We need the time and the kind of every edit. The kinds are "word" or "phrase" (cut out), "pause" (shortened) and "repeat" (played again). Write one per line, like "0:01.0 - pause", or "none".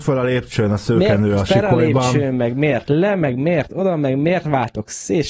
none

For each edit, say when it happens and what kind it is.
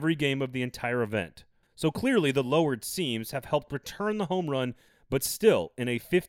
none

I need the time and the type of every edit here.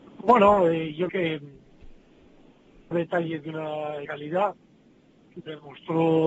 0:01.1 - word
0:02.9 - word
0:04.1 - word

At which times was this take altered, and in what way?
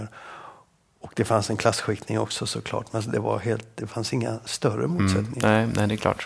none

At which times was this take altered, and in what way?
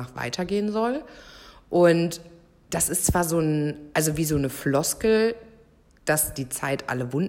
none

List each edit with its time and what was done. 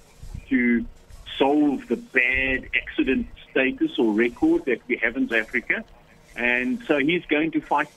0:05.3 - word

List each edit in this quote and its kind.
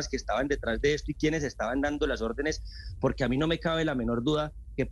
none

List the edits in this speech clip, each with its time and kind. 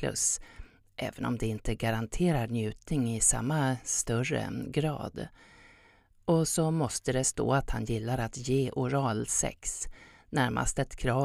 none

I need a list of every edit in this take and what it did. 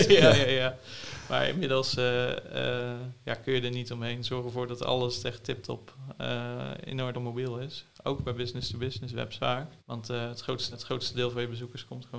0:07.1 - word
0:09.4 - word
0:09.8 - pause
0:10.7 - repeat

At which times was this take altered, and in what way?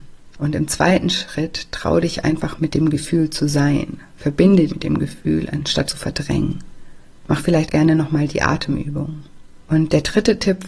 0:02.6 - word
0:04.7 - word
0:05.9 - word
0:07.7 - word

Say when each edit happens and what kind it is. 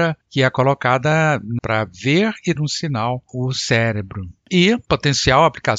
0:01.6 - word
0:02.6 - word
0:03.3 - word

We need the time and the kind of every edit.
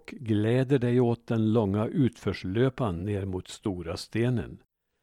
none

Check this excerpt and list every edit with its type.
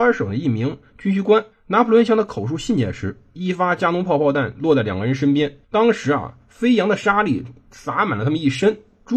0:01.5 - pause
0:05.6 - pause

